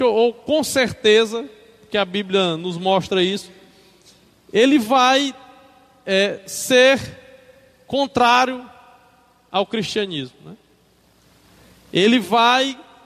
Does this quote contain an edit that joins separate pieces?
no; 0 cuts

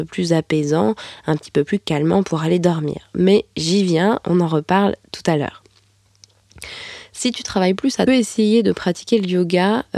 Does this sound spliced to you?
yes; 2 cuts; at 4.2 s, 8.1 s

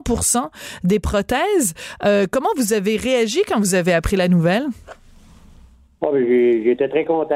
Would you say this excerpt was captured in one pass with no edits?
yes; 0 cuts

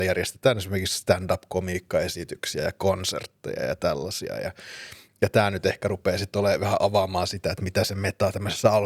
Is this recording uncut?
yes; 0 cuts

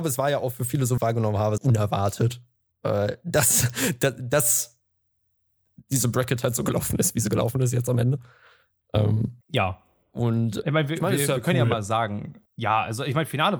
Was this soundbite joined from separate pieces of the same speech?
yes; 5 cuts; at 1.0 s, 1.6 s, 9.4 s, 10.6 s, 12.5 s

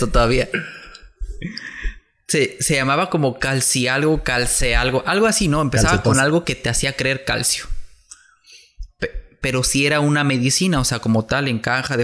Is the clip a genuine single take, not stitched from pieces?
yes; 0 cuts

